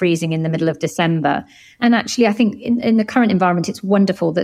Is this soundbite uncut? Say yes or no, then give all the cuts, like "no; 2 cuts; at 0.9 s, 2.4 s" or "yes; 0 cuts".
yes; 0 cuts